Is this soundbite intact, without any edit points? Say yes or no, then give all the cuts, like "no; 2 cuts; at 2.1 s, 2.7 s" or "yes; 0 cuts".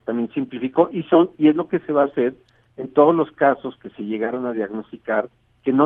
yes; 0 cuts